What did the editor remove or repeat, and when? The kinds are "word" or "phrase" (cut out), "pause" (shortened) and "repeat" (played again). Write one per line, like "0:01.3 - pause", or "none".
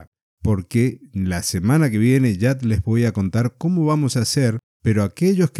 0:04.7 - pause